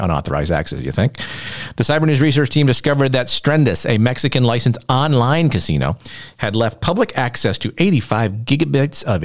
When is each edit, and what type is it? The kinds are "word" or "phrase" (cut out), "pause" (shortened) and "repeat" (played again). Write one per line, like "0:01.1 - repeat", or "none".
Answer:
none